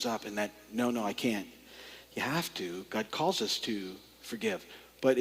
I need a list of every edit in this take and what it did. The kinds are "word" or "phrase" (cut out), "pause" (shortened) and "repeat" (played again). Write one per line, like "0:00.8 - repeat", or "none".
none